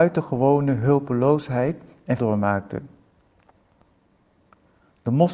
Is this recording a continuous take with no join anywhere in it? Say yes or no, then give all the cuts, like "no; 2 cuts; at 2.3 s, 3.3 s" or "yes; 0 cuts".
no; 1 cut; at 2.2 s